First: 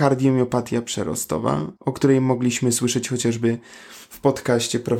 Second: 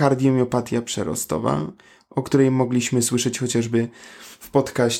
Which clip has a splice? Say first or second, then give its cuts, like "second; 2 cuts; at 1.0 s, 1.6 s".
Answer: first; 1 cut; at 1.8 s